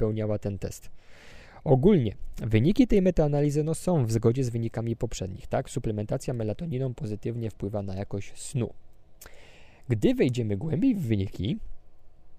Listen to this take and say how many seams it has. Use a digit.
0